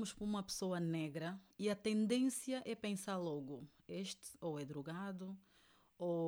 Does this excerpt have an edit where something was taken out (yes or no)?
yes